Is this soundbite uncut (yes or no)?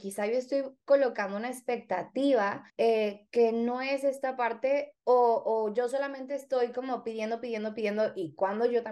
no